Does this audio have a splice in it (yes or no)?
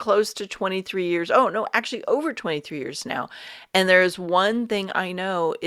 no